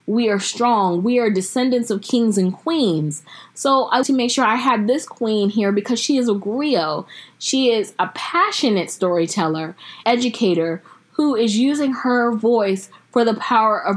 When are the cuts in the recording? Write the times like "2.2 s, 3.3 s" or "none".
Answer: 4.0 s, 10.0 s